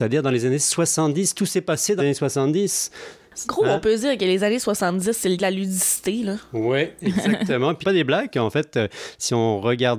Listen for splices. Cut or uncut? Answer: cut